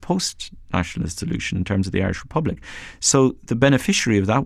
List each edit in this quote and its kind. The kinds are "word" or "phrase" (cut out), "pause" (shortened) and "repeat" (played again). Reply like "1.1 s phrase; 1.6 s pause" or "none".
none